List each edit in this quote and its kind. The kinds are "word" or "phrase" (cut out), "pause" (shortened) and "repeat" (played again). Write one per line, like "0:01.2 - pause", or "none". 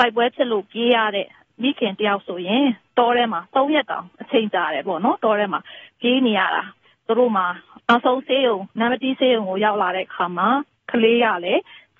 none